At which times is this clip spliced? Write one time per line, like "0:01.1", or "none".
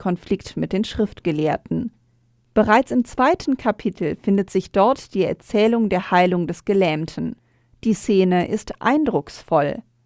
none